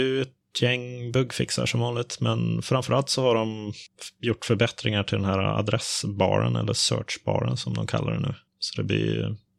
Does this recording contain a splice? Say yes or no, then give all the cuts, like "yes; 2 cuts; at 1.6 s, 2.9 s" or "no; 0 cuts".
no; 0 cuts